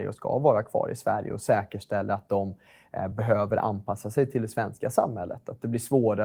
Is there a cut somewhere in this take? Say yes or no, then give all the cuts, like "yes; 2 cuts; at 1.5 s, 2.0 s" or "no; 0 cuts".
no; 0 cuts